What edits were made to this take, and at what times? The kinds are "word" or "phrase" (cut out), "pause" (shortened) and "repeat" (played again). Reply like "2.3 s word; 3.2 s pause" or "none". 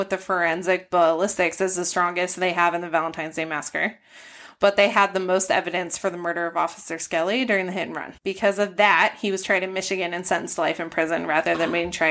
8.2 s pause